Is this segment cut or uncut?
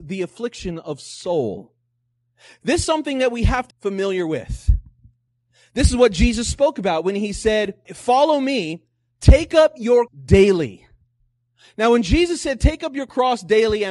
cut